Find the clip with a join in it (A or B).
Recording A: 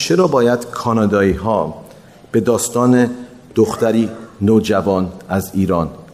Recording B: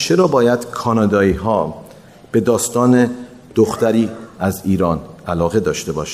B